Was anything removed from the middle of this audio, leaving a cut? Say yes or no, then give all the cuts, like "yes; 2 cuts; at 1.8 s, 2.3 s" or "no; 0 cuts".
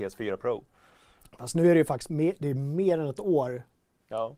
no; 0 cuts